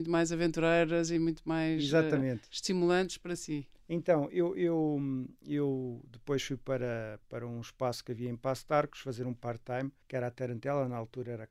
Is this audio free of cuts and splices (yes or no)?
no